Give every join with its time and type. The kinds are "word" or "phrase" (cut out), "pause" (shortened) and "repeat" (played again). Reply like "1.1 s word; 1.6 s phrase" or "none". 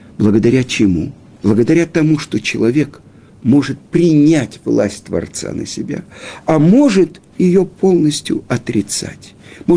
1.3 s pause; 7.3 s pause